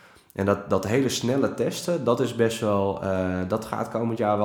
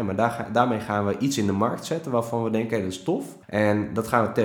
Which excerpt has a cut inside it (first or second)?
second